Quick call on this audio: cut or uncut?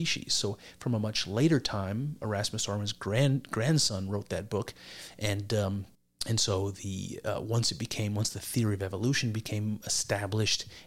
cut